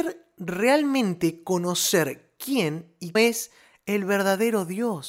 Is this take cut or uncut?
cut